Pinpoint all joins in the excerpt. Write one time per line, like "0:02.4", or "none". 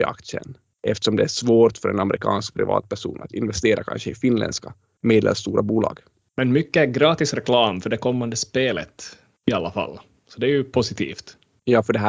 0:03.3